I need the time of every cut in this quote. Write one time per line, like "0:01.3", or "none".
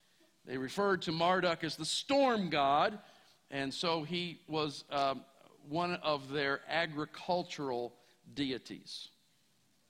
none

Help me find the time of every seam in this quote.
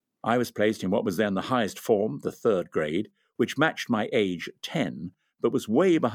none

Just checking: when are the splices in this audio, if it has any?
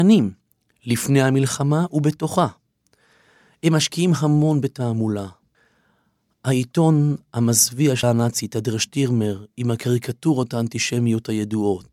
0:08.0

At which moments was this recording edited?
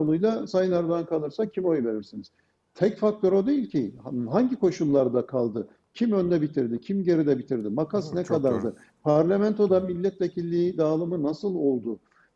none

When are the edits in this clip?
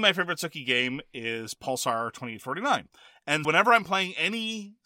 0:03.4

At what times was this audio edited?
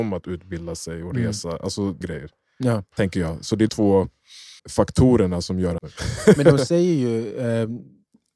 0:02.0
0:03.7
0:04.6
0:05.8

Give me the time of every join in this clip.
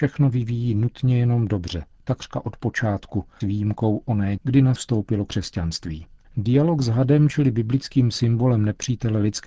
0:02.0
0:03.4
0:04.4
0:04.8
0:06.2

